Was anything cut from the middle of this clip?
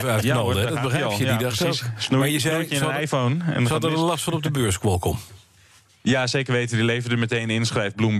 no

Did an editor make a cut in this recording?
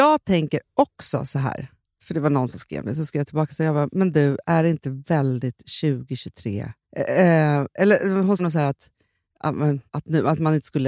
yes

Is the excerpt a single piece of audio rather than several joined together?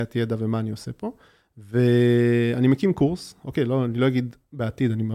yes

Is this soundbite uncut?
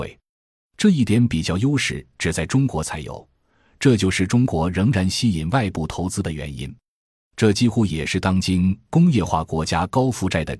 yes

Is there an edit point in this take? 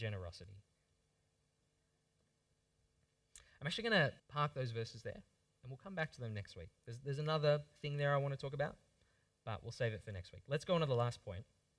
yes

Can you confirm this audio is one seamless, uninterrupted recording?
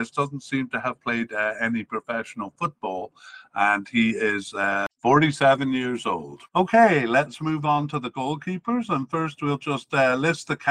no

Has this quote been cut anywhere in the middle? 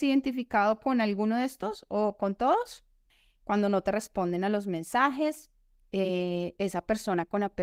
no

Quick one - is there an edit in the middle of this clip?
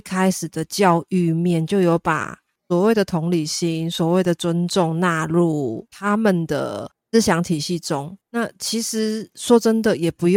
yes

